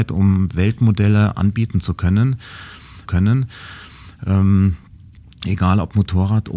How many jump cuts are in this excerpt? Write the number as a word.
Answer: one